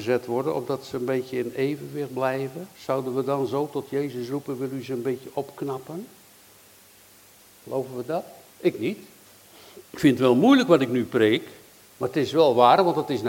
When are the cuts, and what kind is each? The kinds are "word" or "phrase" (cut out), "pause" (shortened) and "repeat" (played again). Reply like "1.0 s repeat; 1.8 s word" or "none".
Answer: 2.7 s pause; 8.5 s pause; 9.9 s pause